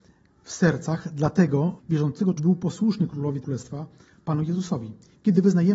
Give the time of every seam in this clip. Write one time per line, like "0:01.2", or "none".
0:01.8
0:02.4
0:03.4